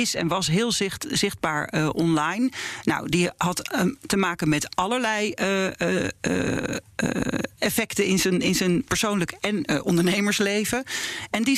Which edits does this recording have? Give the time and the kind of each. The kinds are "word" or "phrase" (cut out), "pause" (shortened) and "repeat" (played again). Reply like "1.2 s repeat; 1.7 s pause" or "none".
7.5 s pause